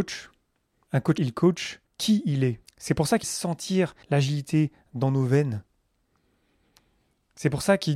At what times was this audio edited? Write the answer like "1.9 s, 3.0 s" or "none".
1.2 s, 1.9 s, 2.6 s, 3.2 s, 4.0 s